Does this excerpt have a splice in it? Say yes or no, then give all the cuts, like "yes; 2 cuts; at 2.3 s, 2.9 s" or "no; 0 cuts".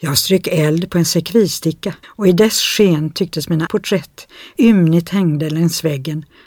yes; 3 cuts; at 2.0 s, 3.7 s, 4.6 s